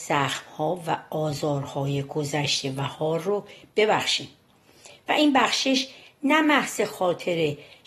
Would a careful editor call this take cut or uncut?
uncut